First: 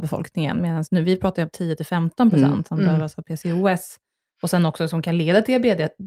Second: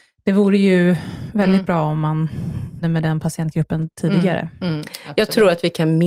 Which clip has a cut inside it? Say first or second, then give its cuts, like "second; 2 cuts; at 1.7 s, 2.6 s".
second; 1 cut; at 2.8 s